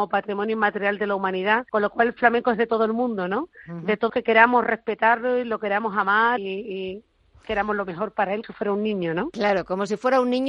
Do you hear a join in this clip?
yes; 4 cuts; at 1.7 s, 4.1 s, 6.4 s, 8.4 s

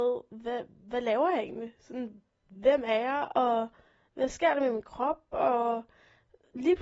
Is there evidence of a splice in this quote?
no; 0 cuts

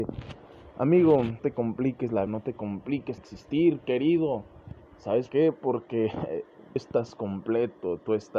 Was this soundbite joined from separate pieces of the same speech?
yes; 5 cuts; at 1.4 s, 2.3 s, 3.2 s, 5.3 s, 6.8 s

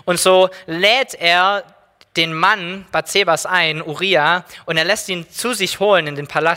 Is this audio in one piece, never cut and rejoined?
yes; 0 cuts

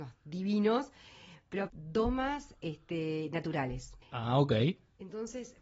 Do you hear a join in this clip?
yes; 1 cut; at 1.7 s

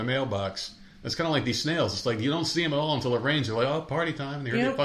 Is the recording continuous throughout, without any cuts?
yes; 0 cuts

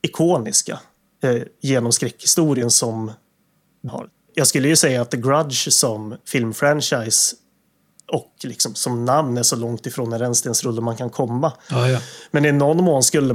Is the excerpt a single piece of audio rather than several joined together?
no; 2 cuts; at 3.9 s, 6.2 s

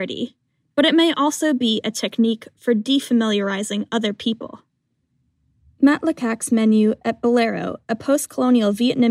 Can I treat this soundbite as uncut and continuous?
yes; 0 cuts

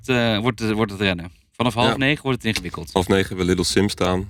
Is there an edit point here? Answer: no; 0 cuts

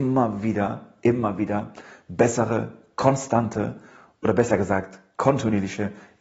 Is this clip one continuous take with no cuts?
yes; 0 cuts

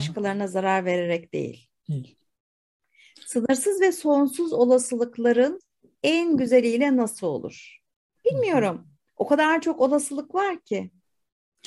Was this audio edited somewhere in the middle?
no; 0 cuts

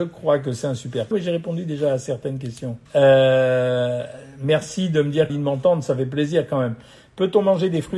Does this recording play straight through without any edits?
no; 3 cuts; at 1.1 s, 2.9 s, 5.3 s

